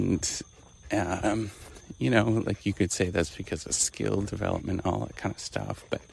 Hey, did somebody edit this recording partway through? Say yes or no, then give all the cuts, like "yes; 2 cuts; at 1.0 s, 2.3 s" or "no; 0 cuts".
no; 0 cuts